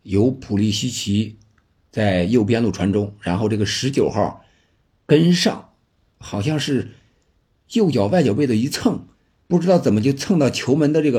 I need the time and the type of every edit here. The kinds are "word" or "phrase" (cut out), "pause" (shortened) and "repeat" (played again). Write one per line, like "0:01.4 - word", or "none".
none